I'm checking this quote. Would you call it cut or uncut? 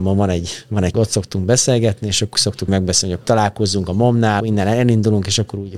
cut